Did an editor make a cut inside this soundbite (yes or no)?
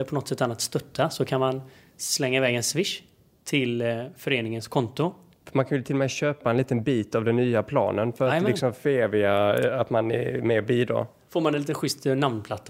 no